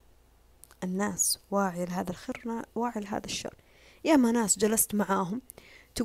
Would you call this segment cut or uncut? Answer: uncut